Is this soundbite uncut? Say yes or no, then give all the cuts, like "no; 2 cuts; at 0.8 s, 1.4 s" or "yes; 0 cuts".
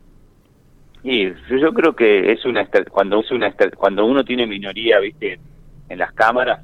no; 1 cut; at 3.2 s